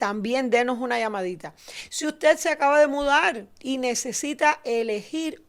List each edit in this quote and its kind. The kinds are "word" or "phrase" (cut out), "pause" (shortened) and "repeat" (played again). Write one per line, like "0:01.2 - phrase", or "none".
none